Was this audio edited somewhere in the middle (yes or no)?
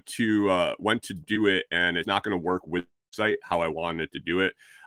yes